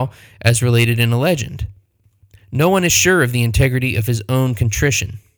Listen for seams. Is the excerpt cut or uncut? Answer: uncut